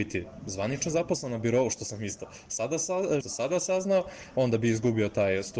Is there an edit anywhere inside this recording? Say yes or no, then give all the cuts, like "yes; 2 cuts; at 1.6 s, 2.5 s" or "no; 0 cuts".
yes; 1 cut; at 3.2 s